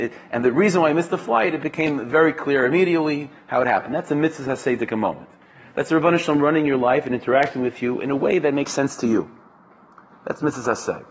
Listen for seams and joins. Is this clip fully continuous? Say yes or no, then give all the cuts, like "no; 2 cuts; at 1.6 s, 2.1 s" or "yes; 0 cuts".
yes; 0 cuts